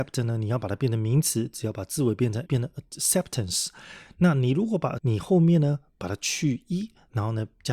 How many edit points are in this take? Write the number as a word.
two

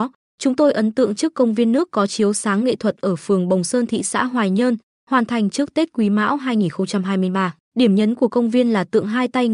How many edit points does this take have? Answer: one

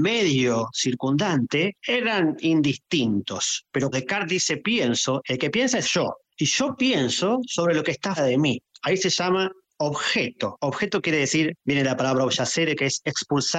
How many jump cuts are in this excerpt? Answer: four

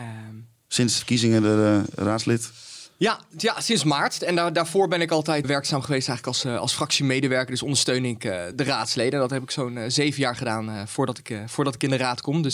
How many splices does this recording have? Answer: three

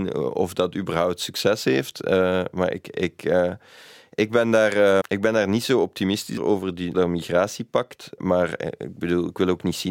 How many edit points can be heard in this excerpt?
three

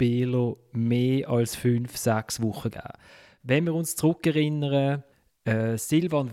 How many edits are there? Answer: zero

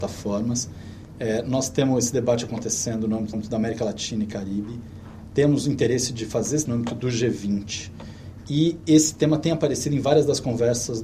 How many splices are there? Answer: two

